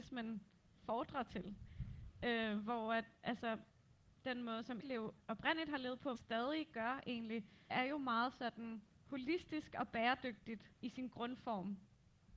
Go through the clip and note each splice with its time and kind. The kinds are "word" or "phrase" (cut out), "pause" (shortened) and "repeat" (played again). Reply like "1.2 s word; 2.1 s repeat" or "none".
4.8 s word; 5.2 s pause; 6.2 s word; 7.7 s word; 10.8 s pause